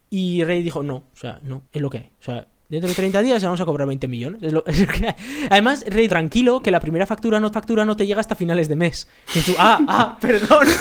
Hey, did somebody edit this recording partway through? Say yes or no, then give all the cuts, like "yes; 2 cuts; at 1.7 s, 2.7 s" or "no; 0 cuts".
yes; 3 cuts; at 1.7 s, 6.1 s, 7.5 s